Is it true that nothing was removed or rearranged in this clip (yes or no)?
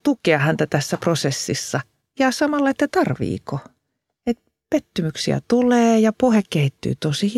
yes